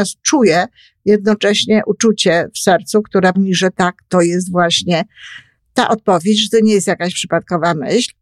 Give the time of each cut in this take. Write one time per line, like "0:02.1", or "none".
0:03.3
0:05.6